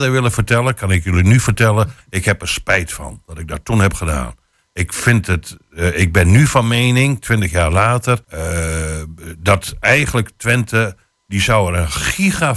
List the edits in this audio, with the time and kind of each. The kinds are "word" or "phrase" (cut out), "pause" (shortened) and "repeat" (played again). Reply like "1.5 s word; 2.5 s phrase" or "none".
8.2 s pause